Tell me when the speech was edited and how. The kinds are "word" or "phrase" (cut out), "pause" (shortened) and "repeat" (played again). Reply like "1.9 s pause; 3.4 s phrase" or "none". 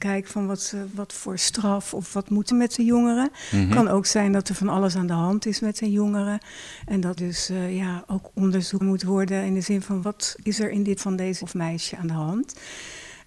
0.9 s word; 2.5 s phrase; 7.2 s word; 8.8 s word; 10.0 s word; 11.0 s word; 11.4 s word